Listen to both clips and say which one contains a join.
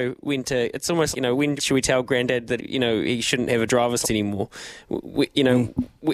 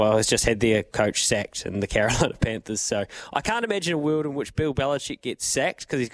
first; 4 cuts; at 1.1 s, 1.6 s, 2.6 s, 4.0 s

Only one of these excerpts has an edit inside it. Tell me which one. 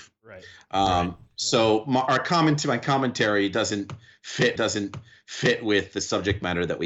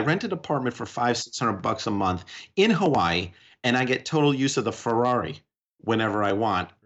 first; 1 cut; at 4.6 s

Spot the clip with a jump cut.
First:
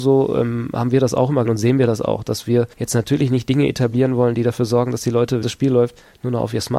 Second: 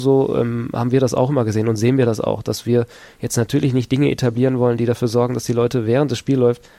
first; 3 cuts; at 1.4 s, 2.7 s, 5.4 s

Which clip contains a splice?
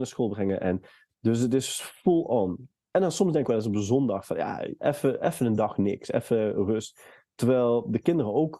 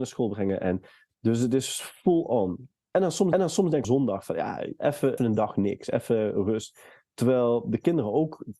second; 3 cuts; at 3.3 s, 3.8 s, 5.2 s

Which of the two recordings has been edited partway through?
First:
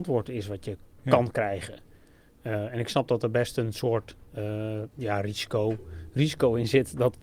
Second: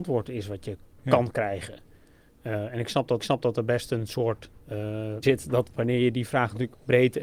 second; 2 cuts; at 3.2 s, 5.2 s

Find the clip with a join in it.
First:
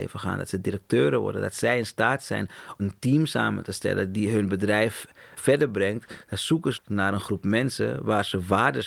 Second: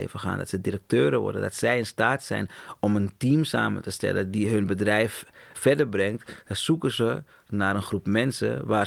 first; 2 cuts; at 2.8 s, 6.7 s

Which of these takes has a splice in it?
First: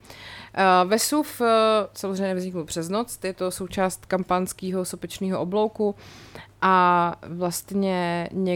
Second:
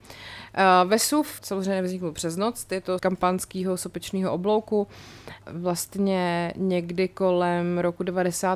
second; 3 cuts; at 1.4 s, 3.0 s, 5.4 s

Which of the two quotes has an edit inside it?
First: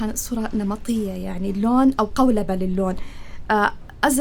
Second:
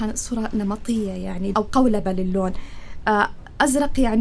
second; 1 cut; at 1.5 s

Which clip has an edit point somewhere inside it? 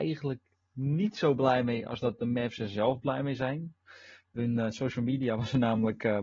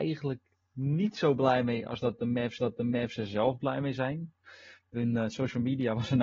second; 1 cut; at 2.6 s

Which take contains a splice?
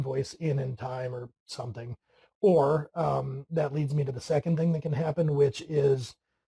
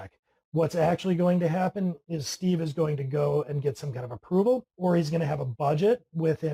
second; 1 cut; at 4.7 s

